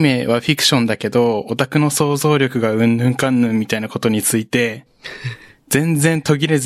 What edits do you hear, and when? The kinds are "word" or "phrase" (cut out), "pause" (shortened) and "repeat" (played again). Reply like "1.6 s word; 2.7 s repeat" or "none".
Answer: none